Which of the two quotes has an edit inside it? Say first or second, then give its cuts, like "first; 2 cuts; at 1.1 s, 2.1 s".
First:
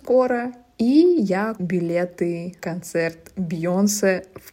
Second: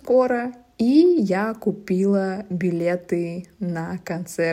first; 2 cuts; at 1.6 s, 2.6 s